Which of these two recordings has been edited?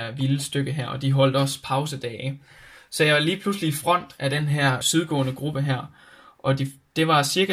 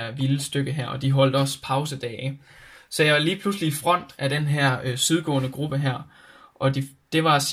first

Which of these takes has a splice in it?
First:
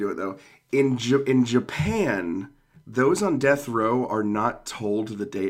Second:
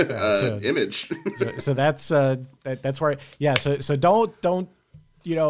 second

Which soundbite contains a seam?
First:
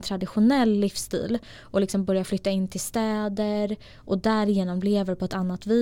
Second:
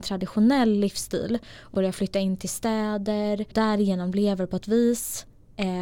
second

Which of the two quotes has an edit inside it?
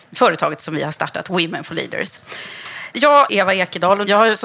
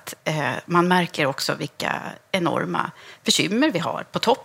first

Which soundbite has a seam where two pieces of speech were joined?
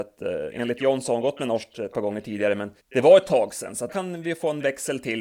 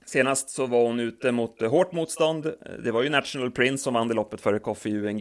first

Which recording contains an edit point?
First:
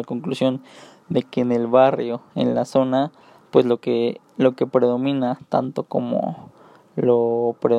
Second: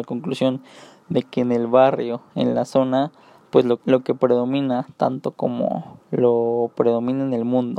second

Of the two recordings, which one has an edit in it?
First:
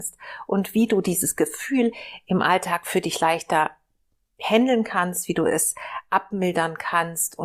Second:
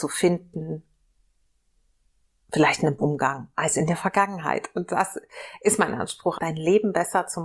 second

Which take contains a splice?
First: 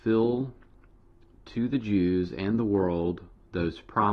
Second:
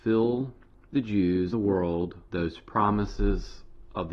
second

